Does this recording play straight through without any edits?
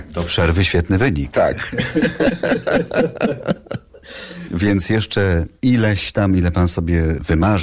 yes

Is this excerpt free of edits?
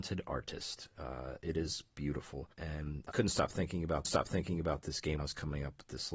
no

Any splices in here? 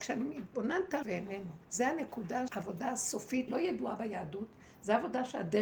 yes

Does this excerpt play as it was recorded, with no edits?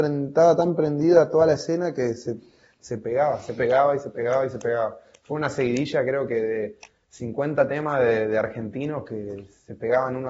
yes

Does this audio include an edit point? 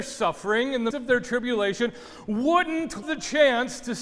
yes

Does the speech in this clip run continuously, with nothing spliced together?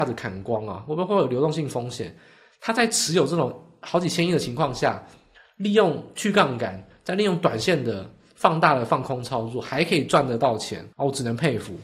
no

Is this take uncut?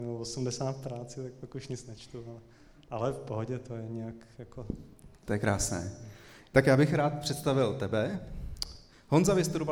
yes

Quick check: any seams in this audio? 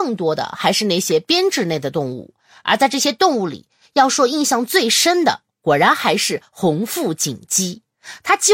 no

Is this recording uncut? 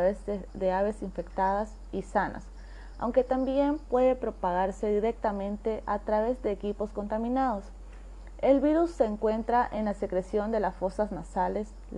yes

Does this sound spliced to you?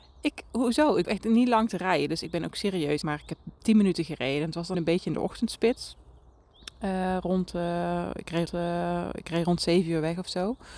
yes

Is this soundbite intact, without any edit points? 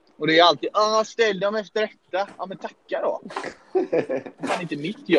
yes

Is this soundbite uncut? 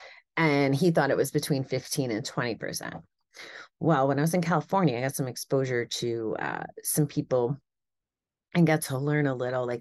yes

